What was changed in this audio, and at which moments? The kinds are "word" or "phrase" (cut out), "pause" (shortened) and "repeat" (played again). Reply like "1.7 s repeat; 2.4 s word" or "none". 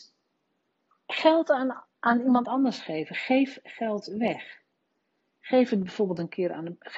none